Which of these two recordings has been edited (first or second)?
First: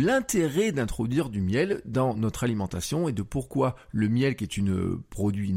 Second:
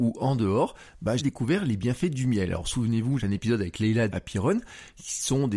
second